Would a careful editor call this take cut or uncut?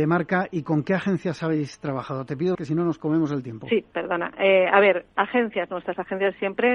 cut